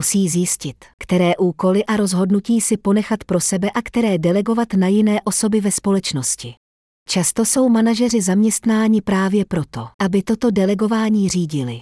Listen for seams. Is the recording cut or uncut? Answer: uncut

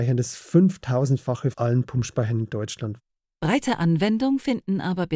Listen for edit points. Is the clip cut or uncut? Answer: cut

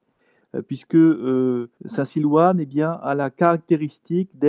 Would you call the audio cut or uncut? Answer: cut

